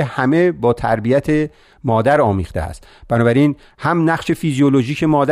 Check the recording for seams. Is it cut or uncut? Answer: uncut